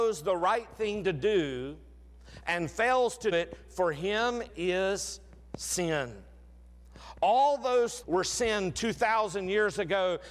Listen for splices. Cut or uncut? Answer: cut